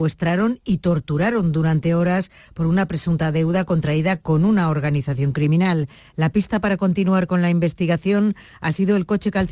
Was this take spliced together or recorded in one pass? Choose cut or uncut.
uncut